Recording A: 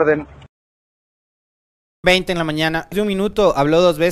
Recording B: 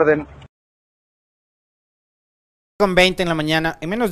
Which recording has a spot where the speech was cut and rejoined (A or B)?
A